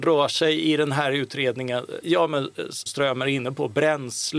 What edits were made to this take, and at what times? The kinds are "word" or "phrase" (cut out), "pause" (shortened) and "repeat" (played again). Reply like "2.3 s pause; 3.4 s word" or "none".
2.0 s phrase; 2.9 s word